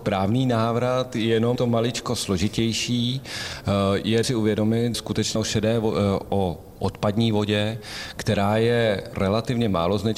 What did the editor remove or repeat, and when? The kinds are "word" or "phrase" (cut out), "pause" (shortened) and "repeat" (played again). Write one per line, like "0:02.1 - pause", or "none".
0:01.6 - word
0:04.2 - word
0:04.9 - word
0:05.4 - word
0:09.1 - word